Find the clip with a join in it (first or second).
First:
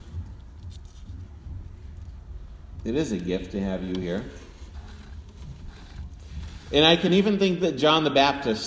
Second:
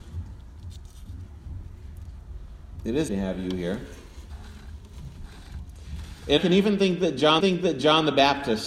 second